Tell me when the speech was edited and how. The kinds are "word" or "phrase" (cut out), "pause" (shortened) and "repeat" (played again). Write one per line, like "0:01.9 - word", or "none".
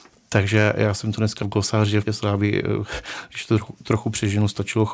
0:01.4 - word
0:02.1 - word